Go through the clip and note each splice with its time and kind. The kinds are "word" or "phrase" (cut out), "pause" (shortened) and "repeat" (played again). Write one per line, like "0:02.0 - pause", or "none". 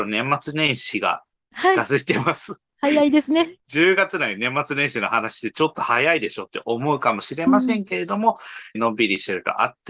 0:01.3 - pause
0:08.8 - phrase